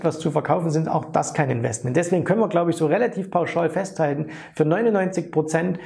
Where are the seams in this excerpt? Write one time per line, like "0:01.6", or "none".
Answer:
none